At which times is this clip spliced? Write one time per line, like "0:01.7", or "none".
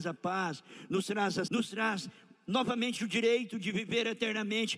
0:01.5